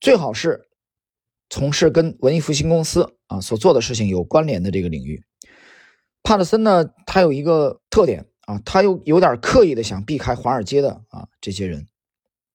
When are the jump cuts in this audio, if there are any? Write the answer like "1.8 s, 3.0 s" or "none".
7.8 s